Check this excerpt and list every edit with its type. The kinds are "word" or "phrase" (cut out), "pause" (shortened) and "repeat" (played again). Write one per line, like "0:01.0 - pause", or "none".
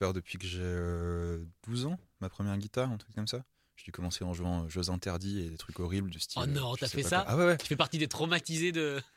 none